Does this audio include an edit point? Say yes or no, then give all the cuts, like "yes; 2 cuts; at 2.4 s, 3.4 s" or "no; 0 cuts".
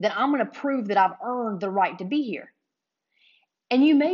no; 0 cuts